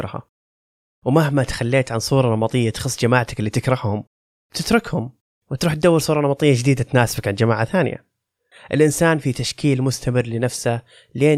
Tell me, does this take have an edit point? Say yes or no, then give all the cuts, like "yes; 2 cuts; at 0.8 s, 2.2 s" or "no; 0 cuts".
no; 0 cuts